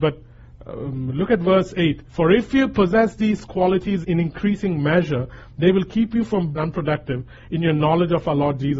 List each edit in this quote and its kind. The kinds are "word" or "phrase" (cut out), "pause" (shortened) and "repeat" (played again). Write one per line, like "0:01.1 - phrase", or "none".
0:02.1 - pause
0:04.0 - word
0:06.5 - phrase

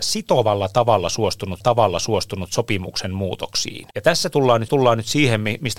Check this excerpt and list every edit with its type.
0:01.6 - repeat
0:03.9 - pause
0:04.7 - repeat

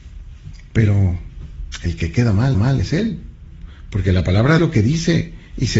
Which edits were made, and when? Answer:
0:02.5 - repeat
0:04.6 - word

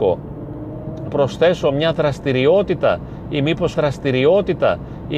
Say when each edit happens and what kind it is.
0:01.1 - phrase
0:03.7 - repeat

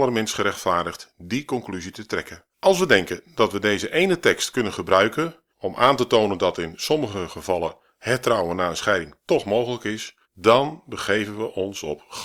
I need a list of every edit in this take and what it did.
0:02.5 - pause
0:05.5 - pause
0:10.2 - pause

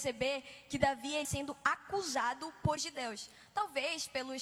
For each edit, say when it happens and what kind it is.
0:01.2 - word
0:02.8 - word

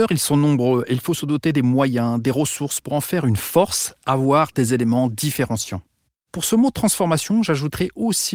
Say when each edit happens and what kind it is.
none

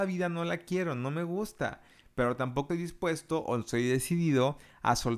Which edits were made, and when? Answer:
0:02.7 - word

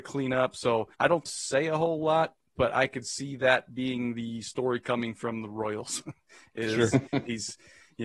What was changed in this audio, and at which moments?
0:00.9 - pause
0:01.3 - phrase

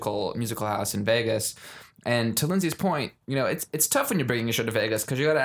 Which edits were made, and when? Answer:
none

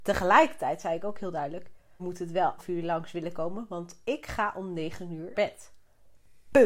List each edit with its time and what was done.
0:02.0 - word
0:02.6 - word
0:05.3 - word

